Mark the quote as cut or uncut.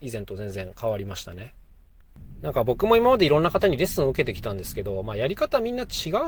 uncut